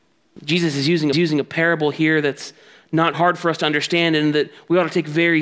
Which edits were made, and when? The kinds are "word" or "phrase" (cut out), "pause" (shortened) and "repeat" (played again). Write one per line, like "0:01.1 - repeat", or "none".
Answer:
0:01.1 - repeat
0:03.1 - word